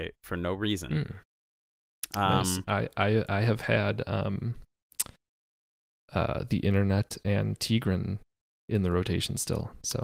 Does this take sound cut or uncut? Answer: uncut